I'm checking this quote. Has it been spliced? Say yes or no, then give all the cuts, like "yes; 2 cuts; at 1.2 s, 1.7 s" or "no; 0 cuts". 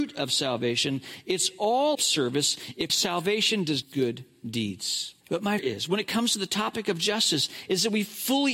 yes; 5 cuts; at 1.9 s, 2.9 s, 3.8 s, 5.2 s, 5.6 s